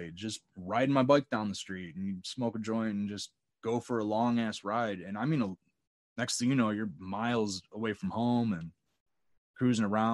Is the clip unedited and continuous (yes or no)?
yes